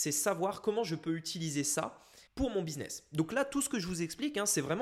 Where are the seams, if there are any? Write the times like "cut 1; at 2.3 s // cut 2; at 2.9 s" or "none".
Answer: cut 1; at 2.3 s